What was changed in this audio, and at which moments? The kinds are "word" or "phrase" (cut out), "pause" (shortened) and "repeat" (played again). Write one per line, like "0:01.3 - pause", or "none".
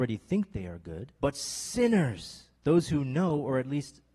0:01.2 - pause
0:02.6 - pause